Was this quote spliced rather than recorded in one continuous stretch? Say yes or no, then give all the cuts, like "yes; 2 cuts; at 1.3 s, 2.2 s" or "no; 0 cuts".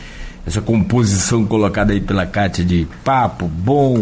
no; 0 cuts